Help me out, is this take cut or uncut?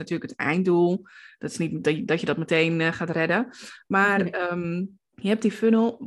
cut